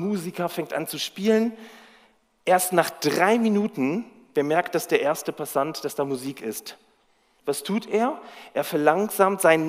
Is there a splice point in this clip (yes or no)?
no